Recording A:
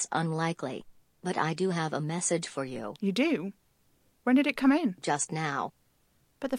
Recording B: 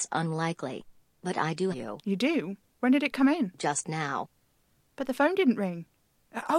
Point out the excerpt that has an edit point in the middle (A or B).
B